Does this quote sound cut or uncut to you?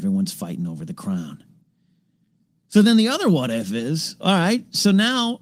uncut